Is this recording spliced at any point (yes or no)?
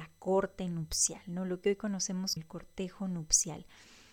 yes